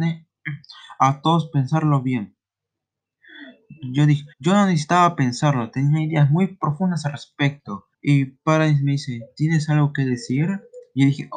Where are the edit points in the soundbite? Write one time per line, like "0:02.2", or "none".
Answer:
0:04.3
0:07.9